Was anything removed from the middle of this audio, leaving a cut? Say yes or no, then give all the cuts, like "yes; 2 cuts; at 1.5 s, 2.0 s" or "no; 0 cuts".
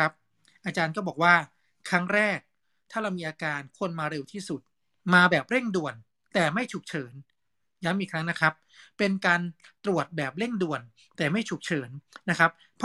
no; 0 cuts